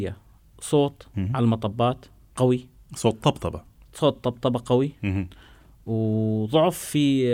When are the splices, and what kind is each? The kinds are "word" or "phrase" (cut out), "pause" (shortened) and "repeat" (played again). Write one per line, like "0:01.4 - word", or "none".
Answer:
none